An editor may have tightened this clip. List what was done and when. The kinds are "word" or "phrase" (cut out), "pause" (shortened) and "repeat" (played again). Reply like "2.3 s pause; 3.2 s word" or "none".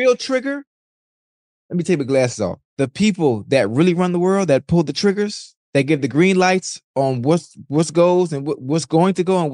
2.7 s pause; 6.9 s pause